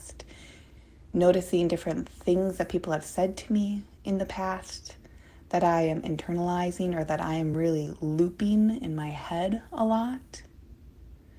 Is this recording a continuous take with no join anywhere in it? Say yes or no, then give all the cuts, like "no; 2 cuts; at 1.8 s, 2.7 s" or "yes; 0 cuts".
yes; 0 cuts